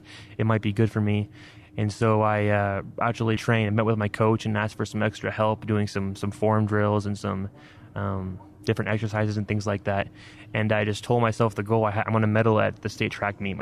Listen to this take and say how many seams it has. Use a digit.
1